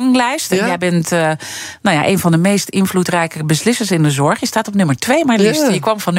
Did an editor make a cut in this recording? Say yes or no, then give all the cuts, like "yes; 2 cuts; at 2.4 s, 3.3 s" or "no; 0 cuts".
no; 0 cuts